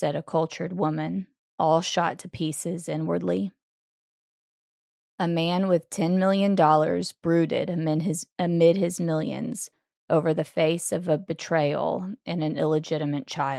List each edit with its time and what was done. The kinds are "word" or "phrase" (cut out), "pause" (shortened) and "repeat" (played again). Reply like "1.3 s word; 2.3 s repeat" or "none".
none

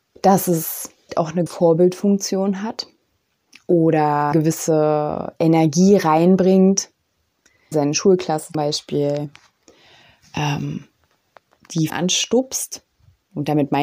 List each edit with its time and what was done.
1.1 s word; 1.5 s word; 4.3 s word; 7.7 s word; 8.5 s word; 11.9 s word

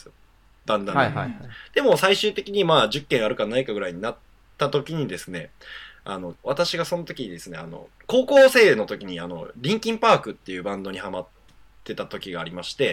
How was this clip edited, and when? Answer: 6.3 s phrase; 8.0 s pause

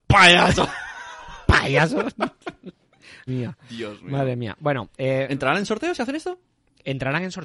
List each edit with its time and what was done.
3.3 s word

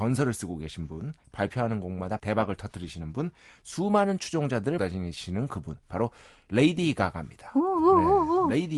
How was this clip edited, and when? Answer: 2.2 s word; 4.8 s word

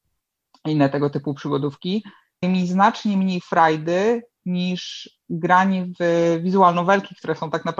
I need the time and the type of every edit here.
2.4 s word

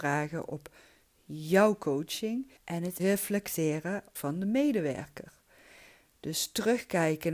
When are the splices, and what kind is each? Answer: 2.6 s pause; 3.0 s word; 4.2 s phrase

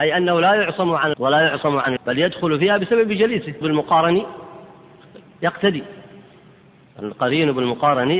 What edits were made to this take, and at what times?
1.1 s word; 2.0 s word; 3.6 s word

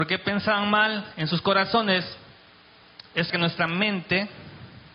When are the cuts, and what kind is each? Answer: 3.3 s word

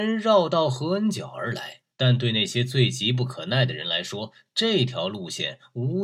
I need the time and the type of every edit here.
1.9 s pause

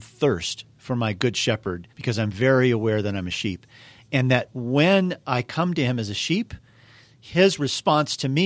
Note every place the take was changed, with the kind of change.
1.9 s pause

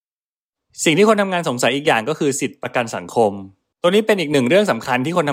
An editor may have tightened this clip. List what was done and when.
none

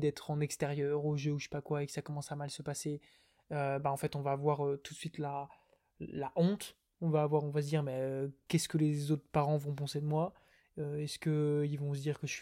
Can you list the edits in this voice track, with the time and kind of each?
none

